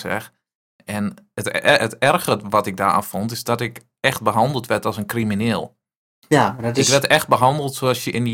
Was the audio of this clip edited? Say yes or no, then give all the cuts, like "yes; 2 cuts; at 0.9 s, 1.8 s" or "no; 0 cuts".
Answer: no; 0 cuts